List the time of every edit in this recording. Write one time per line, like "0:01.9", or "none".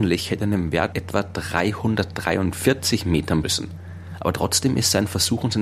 0:00.9
0:03.4